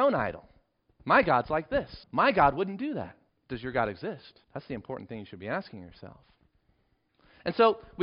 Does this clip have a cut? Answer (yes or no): yes